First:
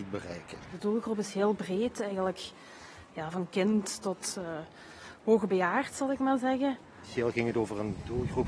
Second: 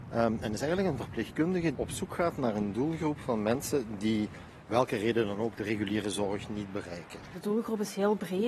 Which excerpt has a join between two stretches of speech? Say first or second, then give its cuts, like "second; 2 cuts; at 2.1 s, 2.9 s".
second; 2 cuts; at 1.7 s, 4.7 s